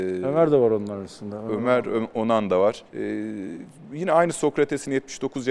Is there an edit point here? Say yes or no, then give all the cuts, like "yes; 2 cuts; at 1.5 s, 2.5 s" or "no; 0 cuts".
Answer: yes; 1 cut; at 2.9 s